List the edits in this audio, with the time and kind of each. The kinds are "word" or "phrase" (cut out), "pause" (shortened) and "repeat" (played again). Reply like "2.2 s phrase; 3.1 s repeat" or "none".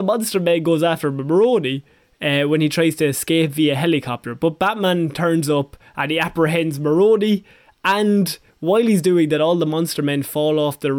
none

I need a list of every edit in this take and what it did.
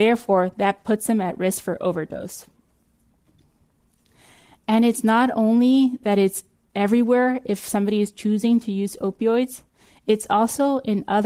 none

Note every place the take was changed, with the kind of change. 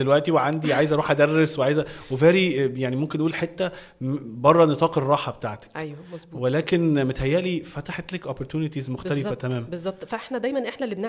none

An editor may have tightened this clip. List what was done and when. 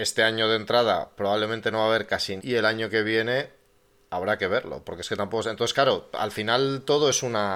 2.4 s word

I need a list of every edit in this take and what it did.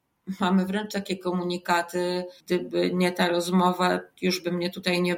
2.4 s pause

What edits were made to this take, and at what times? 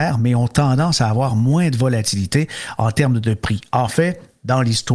none

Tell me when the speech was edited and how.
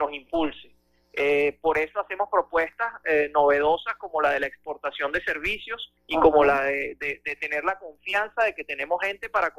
6.0 s pause

